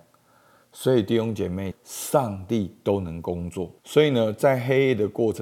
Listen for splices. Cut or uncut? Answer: cut